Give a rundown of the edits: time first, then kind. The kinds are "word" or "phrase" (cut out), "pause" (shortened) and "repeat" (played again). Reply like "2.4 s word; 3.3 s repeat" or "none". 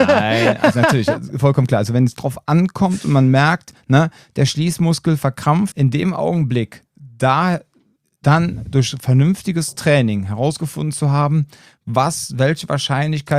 2.1 s word; 5.7 s phrase